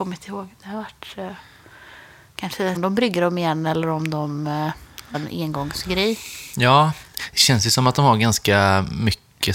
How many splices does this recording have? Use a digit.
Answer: 2